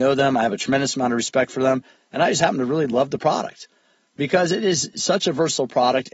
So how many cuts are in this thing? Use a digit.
0